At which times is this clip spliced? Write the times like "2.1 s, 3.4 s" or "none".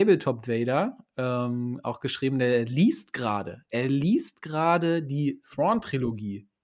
none